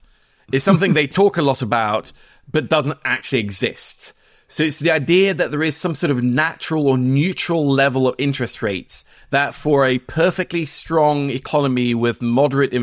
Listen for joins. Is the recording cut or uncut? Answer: uncut